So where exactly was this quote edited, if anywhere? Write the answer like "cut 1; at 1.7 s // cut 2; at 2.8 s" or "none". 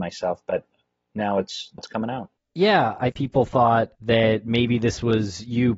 cut 1; at 1.8 s // cut 2; at 3.1 s // cut 3; at 3.9 s